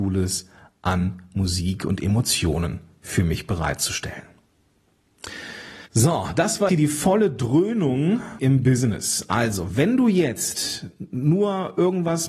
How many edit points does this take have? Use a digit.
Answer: 3